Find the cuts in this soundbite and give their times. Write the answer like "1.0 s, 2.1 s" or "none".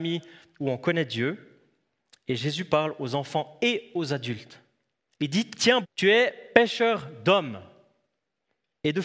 5.8 s

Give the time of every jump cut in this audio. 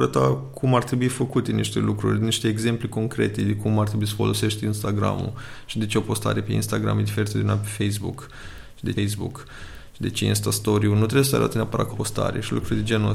8.9 s, 11.9 s

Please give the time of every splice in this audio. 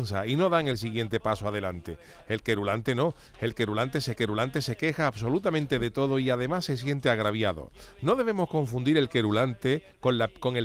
4.2 s

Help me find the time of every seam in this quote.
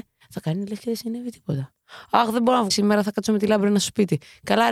2.7 s

